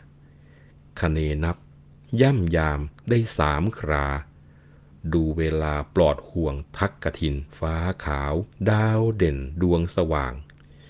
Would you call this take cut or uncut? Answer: cut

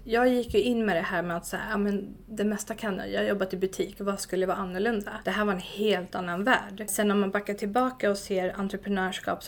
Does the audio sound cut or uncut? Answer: uncut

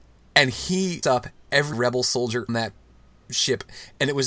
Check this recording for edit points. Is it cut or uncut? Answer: cut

